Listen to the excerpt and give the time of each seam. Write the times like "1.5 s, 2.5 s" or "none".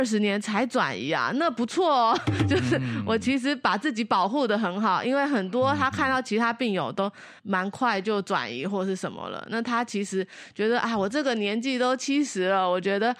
7.4 s